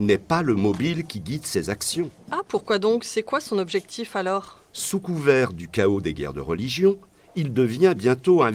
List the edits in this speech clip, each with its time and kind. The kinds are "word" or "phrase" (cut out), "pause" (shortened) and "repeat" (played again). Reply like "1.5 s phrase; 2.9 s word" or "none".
none